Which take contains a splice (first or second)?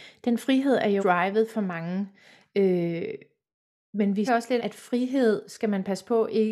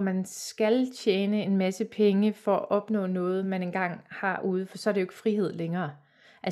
first